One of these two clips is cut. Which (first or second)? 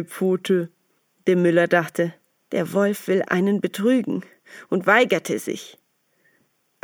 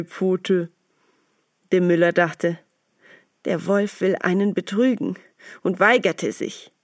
first